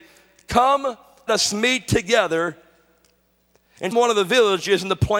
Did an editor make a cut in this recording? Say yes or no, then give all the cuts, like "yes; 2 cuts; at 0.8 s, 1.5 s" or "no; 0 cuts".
yes; 2 cuts; at 1.3 s, 3.9 s